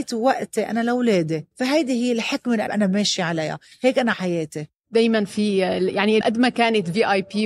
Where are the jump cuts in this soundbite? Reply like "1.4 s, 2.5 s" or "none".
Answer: 1.5 s, 2.7 s, 4.1 s, 6.2 s

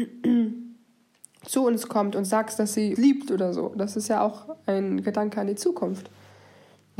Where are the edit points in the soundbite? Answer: 3.0 s

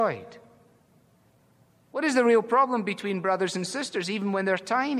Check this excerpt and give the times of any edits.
none

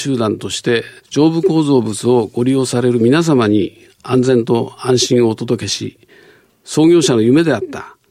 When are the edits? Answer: 1.0 s

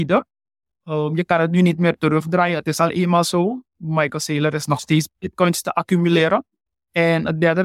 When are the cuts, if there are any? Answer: 5.1 s, 6.7 s

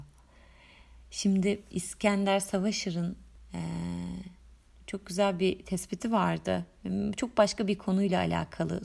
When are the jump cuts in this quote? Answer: none

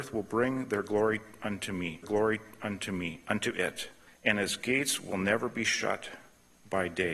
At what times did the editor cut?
2.0 s

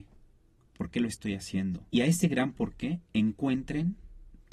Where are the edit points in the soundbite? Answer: 1.9 s

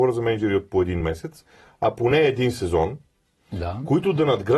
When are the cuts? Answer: none

